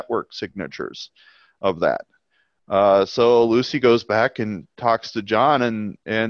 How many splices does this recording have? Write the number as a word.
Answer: zero